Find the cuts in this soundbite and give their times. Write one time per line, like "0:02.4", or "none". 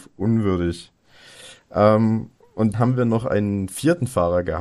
0:02.7